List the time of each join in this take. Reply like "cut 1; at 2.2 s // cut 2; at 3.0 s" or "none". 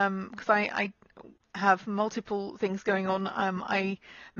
none